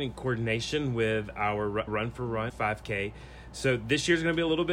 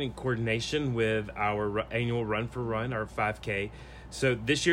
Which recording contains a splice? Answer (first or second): first